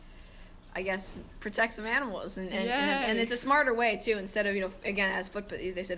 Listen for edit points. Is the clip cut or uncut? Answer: uncut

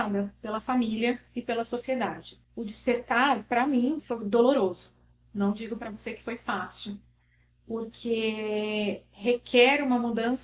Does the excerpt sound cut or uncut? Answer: cut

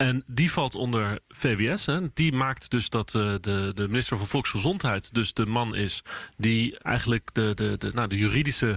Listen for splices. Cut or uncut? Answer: cut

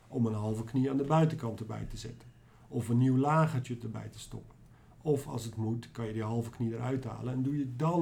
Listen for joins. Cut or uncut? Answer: uncut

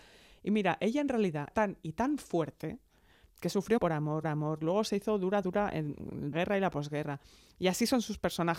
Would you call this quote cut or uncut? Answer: cut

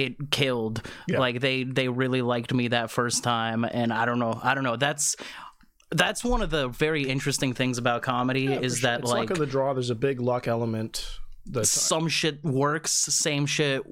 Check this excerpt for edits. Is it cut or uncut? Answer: uncut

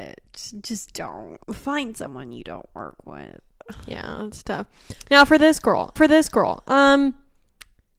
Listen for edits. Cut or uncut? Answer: cut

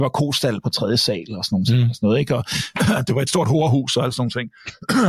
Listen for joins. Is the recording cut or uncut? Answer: uncut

